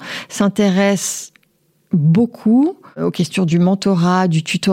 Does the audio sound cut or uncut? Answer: uncut